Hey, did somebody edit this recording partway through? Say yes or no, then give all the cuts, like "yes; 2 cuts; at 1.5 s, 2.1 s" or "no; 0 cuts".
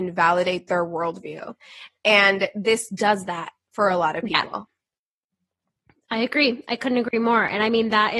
no; 0 cuts